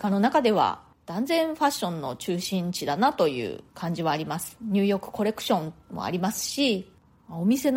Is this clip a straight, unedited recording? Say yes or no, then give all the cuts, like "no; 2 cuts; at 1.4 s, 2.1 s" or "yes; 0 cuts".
no; 1 cut; at 3.7 s